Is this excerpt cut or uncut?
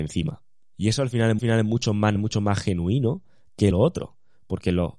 cut